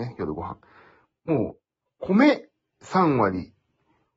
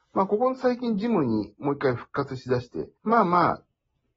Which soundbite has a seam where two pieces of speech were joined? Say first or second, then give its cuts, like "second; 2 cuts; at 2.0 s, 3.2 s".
second; 1 cut; at 3.0 s